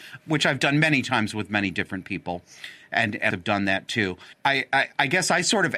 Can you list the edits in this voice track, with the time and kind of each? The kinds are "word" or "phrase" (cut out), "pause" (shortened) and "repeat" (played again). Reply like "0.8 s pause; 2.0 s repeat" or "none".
3.3 s phrase; 4.3 s pause

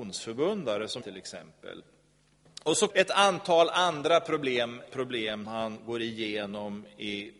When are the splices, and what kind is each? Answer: 1.0 s word; 2.9 s word; 4.9 s word; 5.4 s word

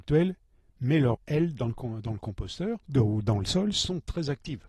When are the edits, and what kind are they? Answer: 1.1 s word; 2.8 s word

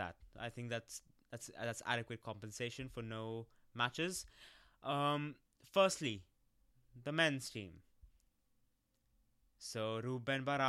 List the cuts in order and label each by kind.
none

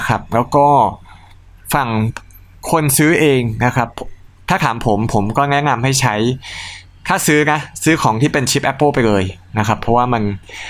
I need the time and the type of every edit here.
none

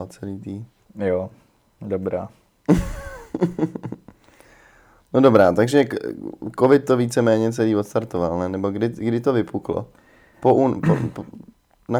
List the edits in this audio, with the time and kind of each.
none

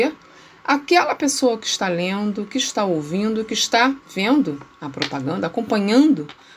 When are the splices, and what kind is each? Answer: 4.0 s pause

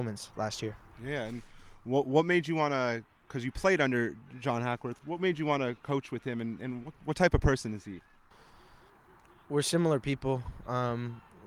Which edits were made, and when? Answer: none

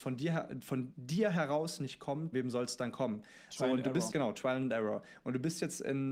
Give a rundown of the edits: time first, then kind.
0.9 s word; 2.3 s word; 4.1 s word

